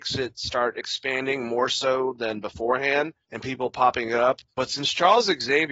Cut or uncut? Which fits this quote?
cut